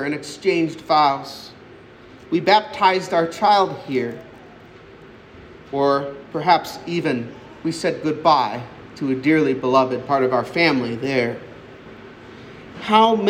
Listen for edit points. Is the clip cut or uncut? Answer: uncut